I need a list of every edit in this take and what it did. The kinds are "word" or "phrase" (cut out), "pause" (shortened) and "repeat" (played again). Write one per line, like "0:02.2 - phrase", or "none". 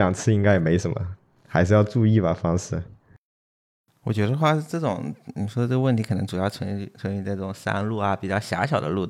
none